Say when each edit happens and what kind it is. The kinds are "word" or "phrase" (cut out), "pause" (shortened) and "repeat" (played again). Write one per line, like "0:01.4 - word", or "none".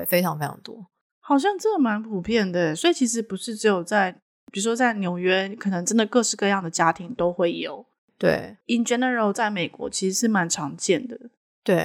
none